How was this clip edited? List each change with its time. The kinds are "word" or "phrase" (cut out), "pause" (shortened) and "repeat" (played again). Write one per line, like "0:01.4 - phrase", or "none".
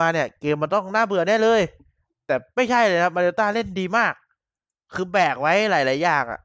none

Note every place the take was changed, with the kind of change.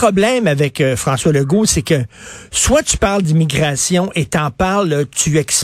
none

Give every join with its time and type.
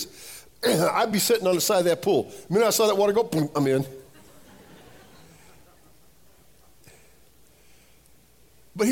none

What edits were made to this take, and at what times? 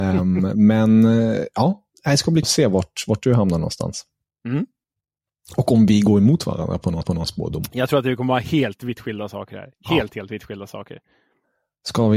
0:02.4 - word
0:07.0 - repeat

